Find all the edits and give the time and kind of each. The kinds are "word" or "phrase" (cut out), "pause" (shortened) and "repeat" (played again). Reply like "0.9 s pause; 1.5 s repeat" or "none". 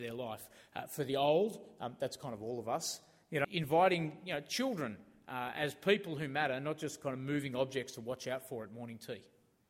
3.4 s word